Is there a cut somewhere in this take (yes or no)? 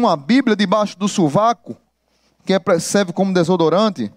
no